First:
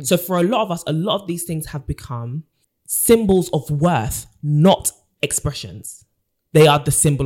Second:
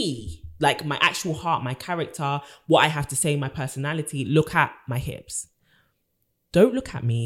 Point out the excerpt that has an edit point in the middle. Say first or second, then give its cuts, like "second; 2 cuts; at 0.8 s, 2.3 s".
first; 1 cut; at 2.6 s